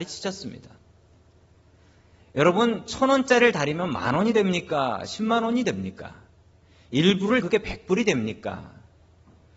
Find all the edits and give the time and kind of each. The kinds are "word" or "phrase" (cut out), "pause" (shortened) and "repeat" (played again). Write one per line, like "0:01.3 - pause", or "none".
0:07.4 - word

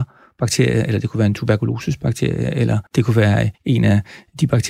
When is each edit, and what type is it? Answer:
0:02.9 - pause
0:03.5 - pause

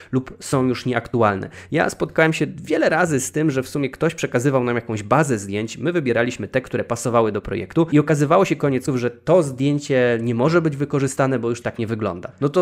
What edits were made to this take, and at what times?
0:08.9 - word
0:11.6 - word

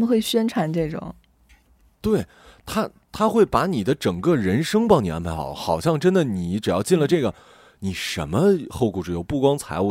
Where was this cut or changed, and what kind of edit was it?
0:02.0 - word

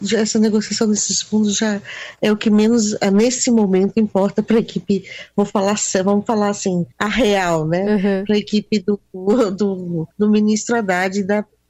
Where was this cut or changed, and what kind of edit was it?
0:06.9 - pause
0:10.1 - pause

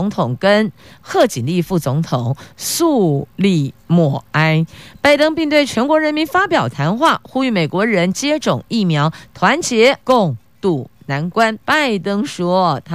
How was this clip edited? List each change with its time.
0:10.0 - pause
0:11.6 - pause

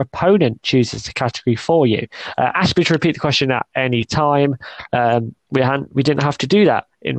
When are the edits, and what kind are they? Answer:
0:05.4 - pause

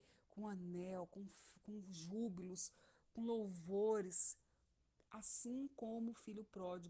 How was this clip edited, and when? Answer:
none

